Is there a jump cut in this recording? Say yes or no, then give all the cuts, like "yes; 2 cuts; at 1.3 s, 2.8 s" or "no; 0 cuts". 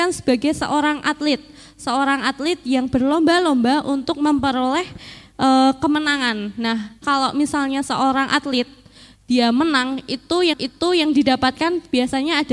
yes; 2 cuts; at 7.0 s, 10.5 s